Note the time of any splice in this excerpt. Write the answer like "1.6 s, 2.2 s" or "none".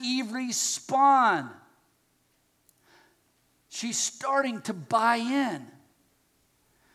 none